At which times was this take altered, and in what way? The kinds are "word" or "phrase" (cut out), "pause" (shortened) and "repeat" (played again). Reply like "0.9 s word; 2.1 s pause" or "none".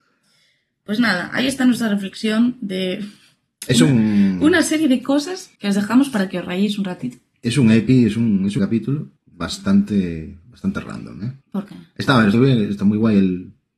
5.6 s pause; 8.6 s phrase; 9.2 s pause; 11.4 s pause; 12.3 s word